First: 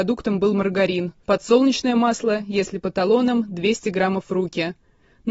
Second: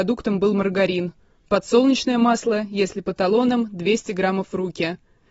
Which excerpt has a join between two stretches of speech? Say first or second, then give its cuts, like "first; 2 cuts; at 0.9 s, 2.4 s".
first; 1 cut; at 1.2 s